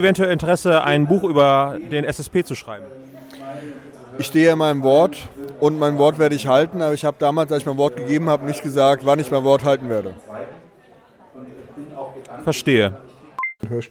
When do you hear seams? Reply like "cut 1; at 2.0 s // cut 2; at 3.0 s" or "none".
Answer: none